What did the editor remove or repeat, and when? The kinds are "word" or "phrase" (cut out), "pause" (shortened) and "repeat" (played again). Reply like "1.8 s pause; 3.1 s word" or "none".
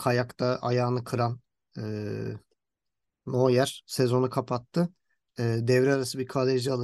none